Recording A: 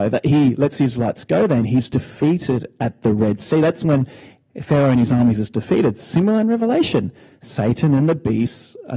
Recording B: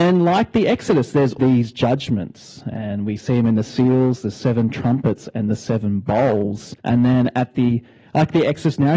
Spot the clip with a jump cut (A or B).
B